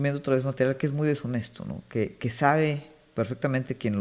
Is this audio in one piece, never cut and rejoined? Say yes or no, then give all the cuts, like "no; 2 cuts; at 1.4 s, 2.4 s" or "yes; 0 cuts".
yes; 0 cuts